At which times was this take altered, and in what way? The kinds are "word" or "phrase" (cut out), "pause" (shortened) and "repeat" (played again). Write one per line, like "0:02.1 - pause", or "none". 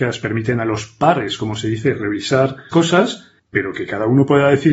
0:02.7 - word
0:03.4 - pause